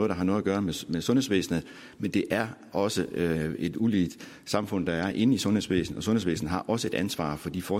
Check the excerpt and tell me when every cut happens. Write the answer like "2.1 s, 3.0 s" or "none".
none